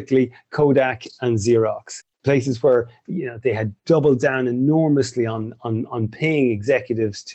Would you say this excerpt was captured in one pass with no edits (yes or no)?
no